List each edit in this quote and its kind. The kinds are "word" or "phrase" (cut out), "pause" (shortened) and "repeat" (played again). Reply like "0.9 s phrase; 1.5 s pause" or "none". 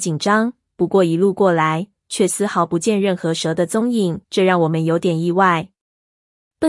4.2 s pause